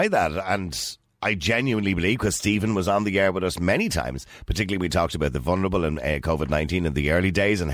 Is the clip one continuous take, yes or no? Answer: yes